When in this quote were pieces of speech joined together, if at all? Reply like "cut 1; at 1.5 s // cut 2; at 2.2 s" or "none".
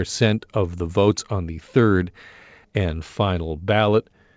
none